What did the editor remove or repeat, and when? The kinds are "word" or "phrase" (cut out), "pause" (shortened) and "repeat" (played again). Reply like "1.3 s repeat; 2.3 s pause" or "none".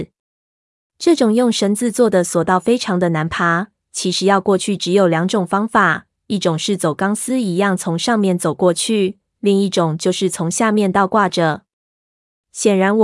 none